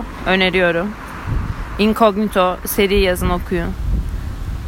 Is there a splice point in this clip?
no; 0 cuts

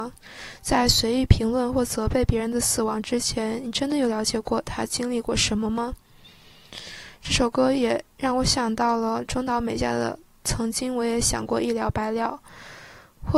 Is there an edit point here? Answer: no; 0 cuts

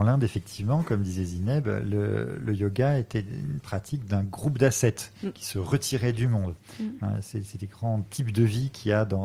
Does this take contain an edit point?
no; 0 cuts

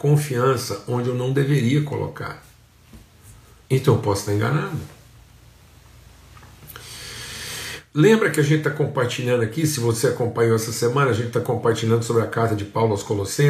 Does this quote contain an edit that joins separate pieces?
no; 0 cuts

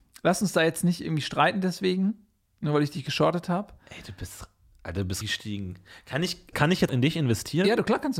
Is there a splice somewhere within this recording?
yes; 3 cuts; at 5.2 s, 6.5 s, 6.9 s

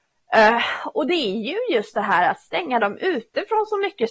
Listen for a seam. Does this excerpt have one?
no; 0 cuts

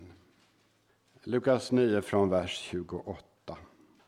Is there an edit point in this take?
no; 0 cuts

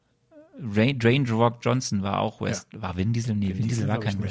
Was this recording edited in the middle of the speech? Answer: no; 0 cuts

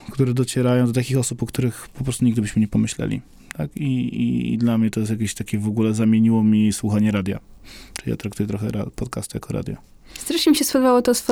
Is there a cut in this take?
no; 0 cuts

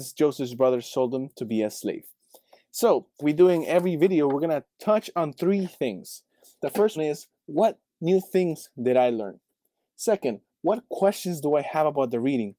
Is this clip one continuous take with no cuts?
no; 2 cuts; at 3.2 s, 7.0 s

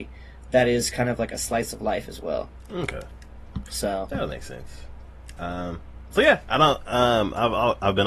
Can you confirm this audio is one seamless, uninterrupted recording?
yes; 0 cuts

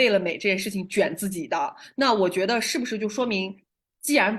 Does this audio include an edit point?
no; 0 cuts

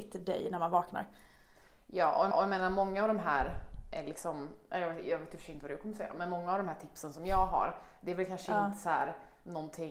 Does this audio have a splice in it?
yes; 1 cut; at 2.3 s

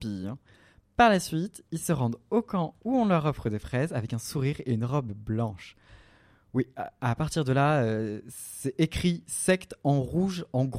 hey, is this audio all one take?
yes; 0 cuts

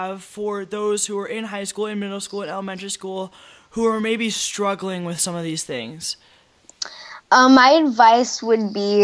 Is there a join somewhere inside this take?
no; 0 cuts

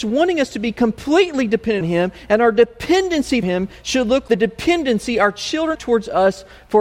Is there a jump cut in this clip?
yes; 4 cuts; at 1.8 s, 3.4 s, 4.3 s, 5.7 s

